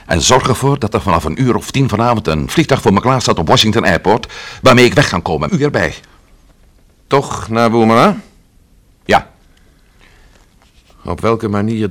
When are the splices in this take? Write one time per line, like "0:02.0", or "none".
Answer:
0:05.5